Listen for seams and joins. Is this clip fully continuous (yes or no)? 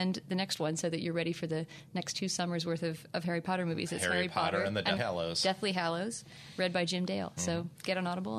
no